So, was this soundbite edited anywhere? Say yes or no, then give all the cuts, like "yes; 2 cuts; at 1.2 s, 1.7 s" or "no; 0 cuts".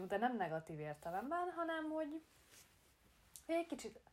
no; 0 cuts